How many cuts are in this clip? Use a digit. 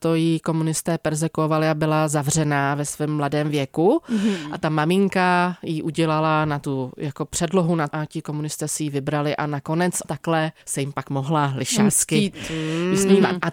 3